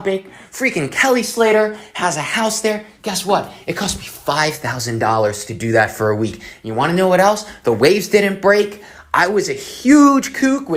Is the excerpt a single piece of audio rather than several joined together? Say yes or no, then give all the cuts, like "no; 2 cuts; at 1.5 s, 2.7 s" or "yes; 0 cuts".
yes; 0 cuts